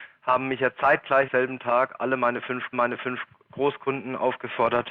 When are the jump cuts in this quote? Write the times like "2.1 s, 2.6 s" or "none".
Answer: 1.3 s, 2.7 s